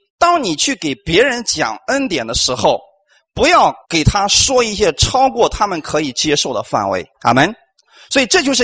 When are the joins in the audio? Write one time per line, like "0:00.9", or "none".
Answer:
0:03.8
0:07.1